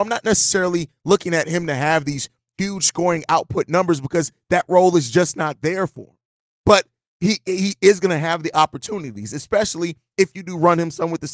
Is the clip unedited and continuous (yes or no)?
yes